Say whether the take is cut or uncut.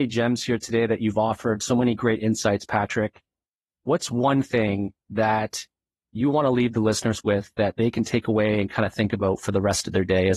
uncut